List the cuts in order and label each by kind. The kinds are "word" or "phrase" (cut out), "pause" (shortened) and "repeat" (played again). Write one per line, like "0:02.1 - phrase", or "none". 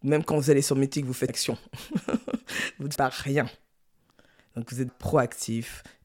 0:01.3 - word
0:03.0 - word
0:04.9 - word